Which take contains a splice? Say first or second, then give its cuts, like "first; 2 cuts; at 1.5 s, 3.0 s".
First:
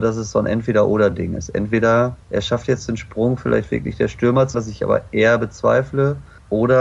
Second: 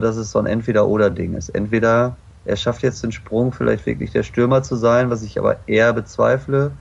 first; 2 cuts; at 2.2 s, 4.5 s